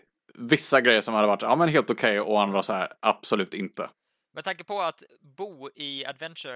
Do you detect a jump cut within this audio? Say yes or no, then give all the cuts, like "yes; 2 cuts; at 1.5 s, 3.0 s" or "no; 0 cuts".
no; 0 cuts